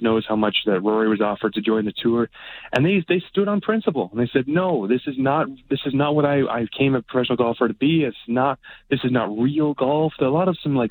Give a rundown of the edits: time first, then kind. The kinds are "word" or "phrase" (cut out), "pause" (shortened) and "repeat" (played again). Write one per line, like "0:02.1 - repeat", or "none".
none